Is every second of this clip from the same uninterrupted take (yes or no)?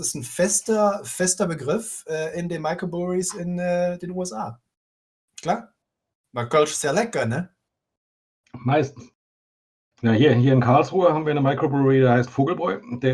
yes